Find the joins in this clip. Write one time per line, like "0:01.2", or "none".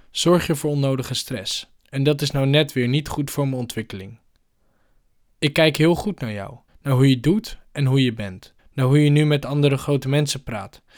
0:01.8
0:06.7
0:08.6